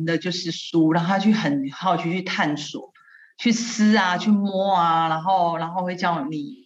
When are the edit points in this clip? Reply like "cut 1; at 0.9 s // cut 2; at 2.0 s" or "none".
none